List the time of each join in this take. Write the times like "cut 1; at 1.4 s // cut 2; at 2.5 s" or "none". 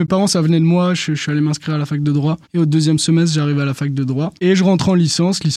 cut 1; at 2.4 s // cut 2; at 4.4 s